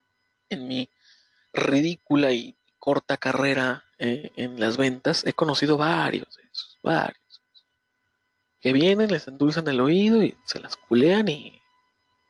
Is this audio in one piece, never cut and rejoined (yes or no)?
yes